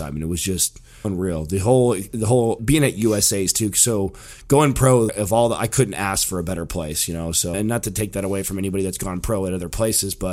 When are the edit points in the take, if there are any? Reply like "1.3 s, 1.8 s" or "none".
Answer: 1.0 s, 2.6 s, 5.1 s, 7.5 s